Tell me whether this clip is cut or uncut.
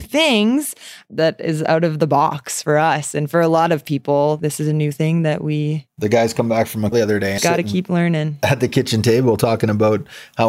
cut